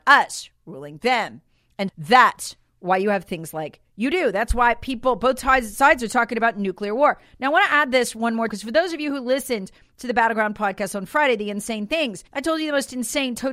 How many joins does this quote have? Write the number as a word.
four